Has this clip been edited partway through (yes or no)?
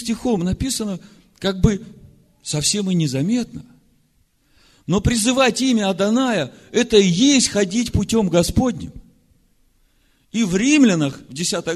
no